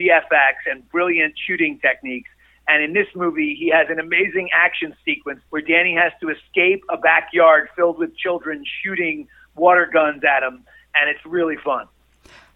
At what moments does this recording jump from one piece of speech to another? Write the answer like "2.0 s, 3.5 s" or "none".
5.5 s